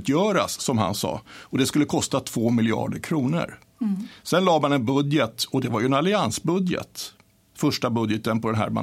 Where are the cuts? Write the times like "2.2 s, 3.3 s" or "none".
none